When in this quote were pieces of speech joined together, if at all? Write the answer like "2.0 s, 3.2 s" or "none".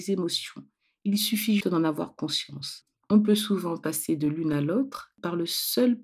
1.6 s, 3.0 s